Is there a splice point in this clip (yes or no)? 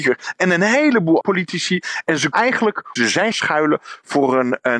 yes